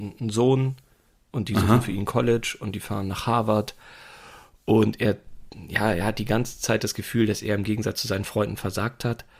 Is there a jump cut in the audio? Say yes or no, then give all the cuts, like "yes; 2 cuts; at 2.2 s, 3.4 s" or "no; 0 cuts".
no; 0 cuts